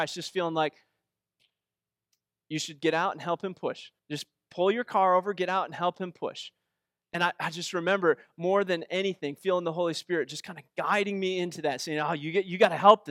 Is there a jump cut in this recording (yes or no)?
yes